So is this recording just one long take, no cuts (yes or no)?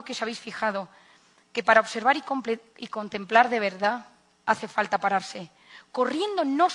yes